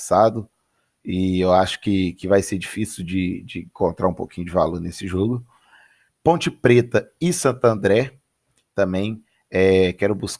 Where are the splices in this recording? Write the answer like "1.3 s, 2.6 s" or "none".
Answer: none